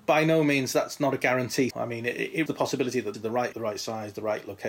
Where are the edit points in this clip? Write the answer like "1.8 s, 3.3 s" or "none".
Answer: 1.7 s, 2.5 s, 3.1 s, 3.5 s